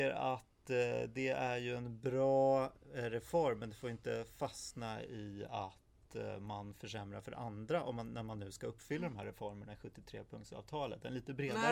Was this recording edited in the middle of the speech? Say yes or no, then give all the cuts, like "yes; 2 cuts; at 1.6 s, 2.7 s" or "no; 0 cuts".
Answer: no; 0 cuts